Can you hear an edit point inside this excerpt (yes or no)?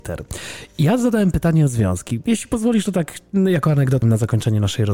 yes